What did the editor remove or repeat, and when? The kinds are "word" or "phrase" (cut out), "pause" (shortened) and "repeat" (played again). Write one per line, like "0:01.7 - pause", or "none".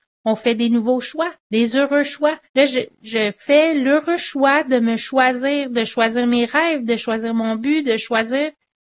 0:01.4 - pause
0:02.4 - pause